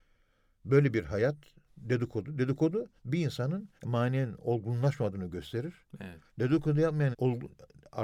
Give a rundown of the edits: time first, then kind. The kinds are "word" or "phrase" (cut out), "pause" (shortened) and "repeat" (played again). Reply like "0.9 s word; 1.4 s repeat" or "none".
1.7 s word; 3.0 s pause; 3.8 s pause; 6.3 s pause; 7.1 s word